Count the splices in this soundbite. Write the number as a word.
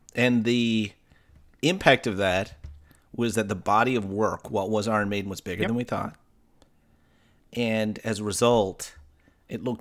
zero